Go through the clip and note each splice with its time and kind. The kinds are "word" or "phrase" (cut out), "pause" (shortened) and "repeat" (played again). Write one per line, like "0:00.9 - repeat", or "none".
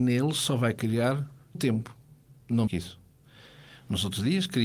0:01.5 - word
0:02.7 - word